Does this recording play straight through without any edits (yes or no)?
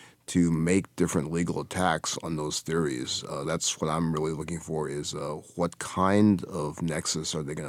no